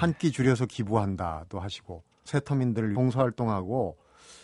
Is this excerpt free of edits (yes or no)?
no